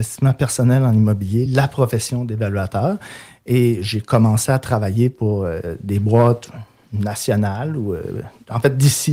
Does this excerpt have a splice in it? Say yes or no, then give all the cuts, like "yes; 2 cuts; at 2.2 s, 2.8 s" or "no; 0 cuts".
no; 0 cuts